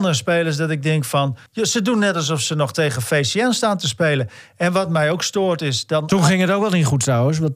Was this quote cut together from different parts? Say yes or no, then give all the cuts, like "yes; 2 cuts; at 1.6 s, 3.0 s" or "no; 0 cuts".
yes; 1 cut; at 1.5 s